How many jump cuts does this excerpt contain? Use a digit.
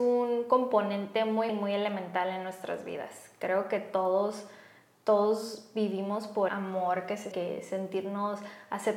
3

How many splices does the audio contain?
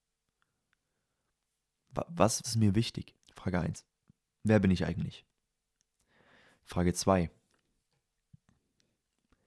3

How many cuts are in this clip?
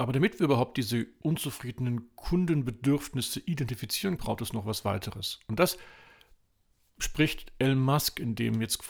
2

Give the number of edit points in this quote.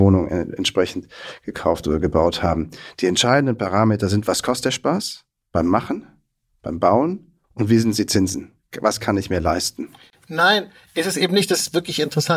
1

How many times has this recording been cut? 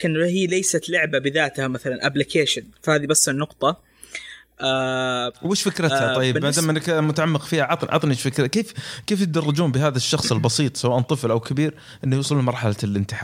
1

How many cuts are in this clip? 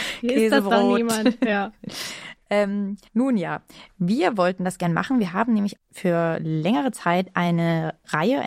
2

